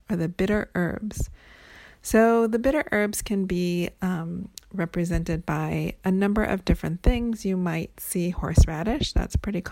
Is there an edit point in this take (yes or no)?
no